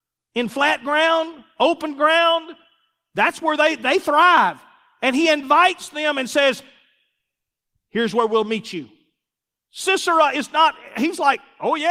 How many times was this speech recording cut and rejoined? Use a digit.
0